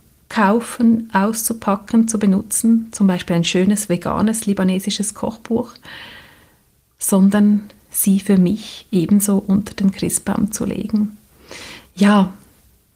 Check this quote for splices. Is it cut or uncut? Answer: uncut